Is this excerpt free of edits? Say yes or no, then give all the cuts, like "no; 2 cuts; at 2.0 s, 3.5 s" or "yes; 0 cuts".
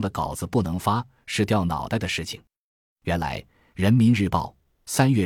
yes; 0 cuts